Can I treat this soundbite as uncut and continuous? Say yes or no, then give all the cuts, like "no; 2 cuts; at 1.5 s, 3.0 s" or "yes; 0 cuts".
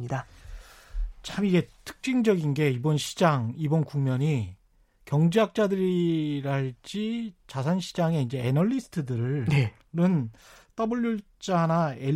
yes; 0 cuts